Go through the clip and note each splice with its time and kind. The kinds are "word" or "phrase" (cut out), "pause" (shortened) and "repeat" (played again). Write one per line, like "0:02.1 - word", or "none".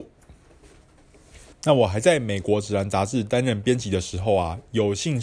0:01.5 - pause